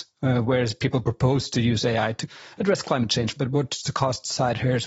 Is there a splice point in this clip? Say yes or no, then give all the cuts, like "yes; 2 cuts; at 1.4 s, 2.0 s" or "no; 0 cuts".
no; 0 cuts